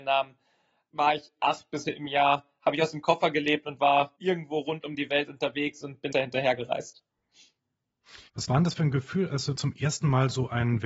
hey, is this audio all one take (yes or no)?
no